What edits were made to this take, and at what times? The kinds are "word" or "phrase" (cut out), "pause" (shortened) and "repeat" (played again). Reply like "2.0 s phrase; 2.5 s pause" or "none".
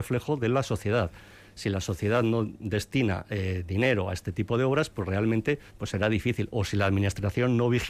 5.7 s pause

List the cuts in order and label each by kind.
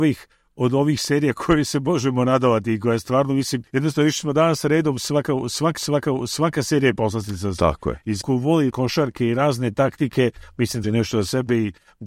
3.7 s pause; 5.8 s repeat; 8.2 s word; 8.7 s word; 10.8 s phrase

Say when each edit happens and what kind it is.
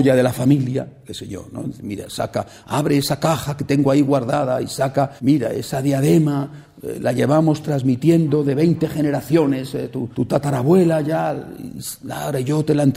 5.2 s pause; 10.1 s pause

